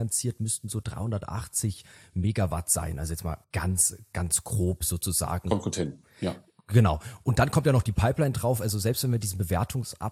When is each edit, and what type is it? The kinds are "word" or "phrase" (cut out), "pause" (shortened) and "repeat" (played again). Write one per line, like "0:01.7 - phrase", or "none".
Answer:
0:03.4 - pause